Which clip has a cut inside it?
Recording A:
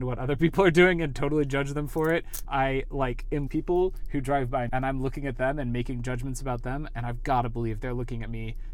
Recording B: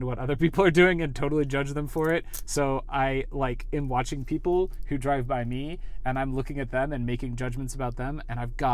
A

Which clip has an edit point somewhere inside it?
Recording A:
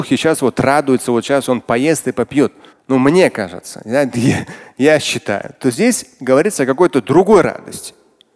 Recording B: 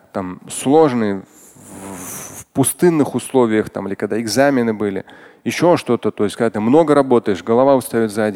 A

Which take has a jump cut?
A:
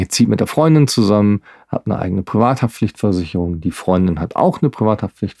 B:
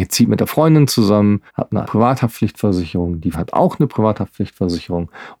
B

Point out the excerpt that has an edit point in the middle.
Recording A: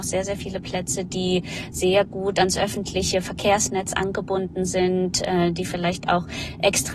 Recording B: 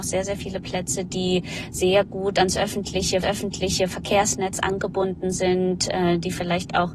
B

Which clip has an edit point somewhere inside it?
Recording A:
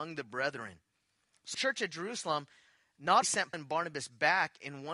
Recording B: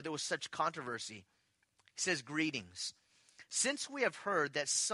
A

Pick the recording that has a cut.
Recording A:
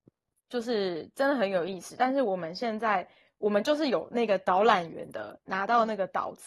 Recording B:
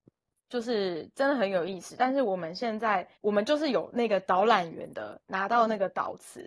B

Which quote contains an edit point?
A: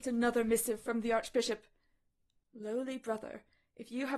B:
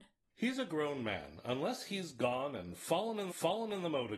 B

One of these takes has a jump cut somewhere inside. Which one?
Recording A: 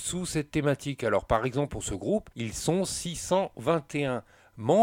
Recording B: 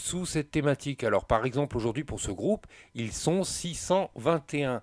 A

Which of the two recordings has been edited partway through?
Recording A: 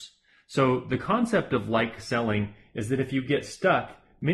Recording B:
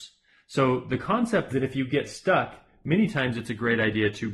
B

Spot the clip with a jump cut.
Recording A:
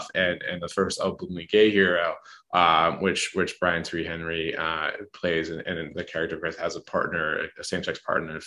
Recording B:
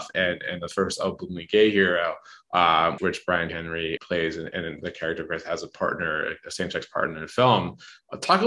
B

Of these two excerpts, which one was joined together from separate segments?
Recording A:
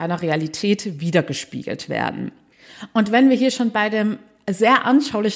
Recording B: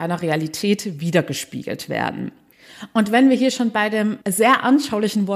B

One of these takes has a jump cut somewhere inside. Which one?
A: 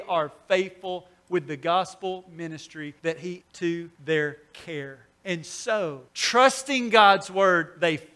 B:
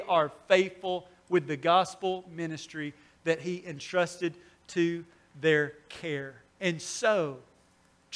A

